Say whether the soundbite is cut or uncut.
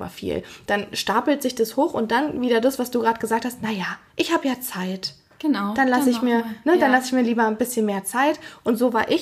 uncut